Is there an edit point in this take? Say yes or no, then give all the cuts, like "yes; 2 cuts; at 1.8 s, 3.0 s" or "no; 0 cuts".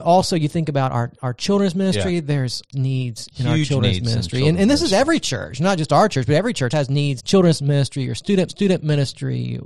yes; 4 cuts; at 2.7 s, 6.7 s, 7.2 s, 8.5 s